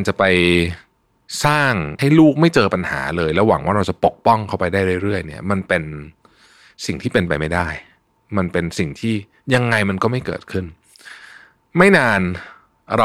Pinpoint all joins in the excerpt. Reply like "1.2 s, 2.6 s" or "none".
2.0 s

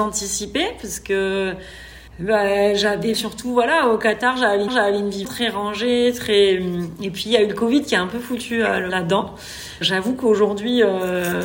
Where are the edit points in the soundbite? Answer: 2.1 s, 3.1 s, 4.7 s, 5.2 s, 8.9 s, 9.8 s

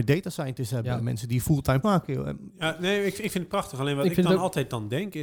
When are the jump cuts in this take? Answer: 1.8 s

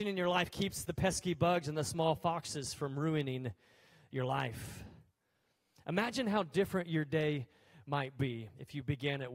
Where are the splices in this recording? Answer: none

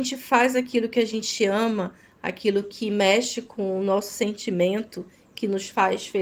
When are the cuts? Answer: none

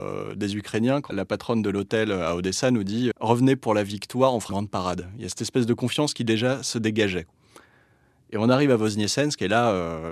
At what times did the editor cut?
1.1 s, 3.1 s, 4.5 s

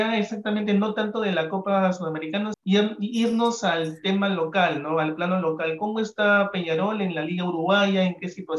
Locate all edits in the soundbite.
2.5 s

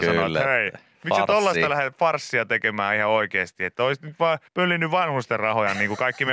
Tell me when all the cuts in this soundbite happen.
4.5 s

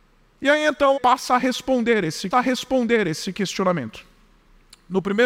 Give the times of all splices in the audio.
0.9 s, 2.3 s

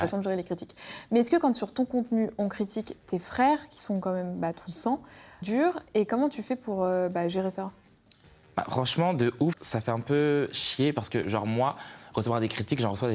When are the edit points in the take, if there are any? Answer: 5.4 s, 9.5 s

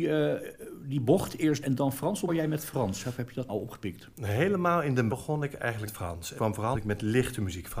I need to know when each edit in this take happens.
1.6 s, 2.3 s, 3.5 s, 5.1 s, 5.9 s, 6.4 s, 6.7 s

